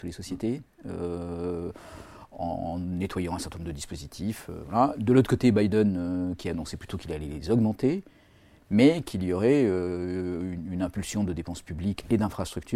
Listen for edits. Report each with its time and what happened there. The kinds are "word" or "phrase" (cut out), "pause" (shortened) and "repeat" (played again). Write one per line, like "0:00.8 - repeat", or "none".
none